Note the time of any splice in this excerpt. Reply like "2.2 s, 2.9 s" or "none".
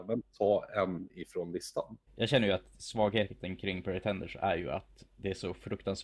2.1 s